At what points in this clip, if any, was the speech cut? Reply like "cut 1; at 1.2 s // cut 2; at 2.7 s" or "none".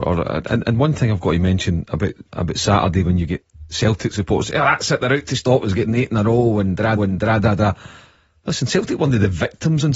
cut 1; at 2.3 s // cut 2; at 7.0 s